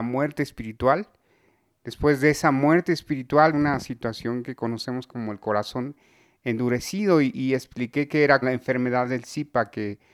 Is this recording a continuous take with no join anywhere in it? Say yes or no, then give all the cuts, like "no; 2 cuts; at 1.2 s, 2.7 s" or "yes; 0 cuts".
no; 2 cuts; at 3.5 s, 8.4 s